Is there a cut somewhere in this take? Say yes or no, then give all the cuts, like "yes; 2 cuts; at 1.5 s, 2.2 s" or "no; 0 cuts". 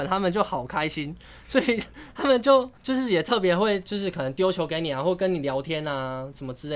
yes; 1 cut; at 2.8 s